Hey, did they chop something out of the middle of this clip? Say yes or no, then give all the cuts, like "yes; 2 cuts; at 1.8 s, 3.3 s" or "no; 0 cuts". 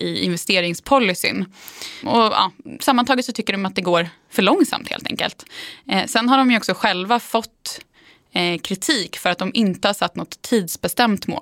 no; 0 cuts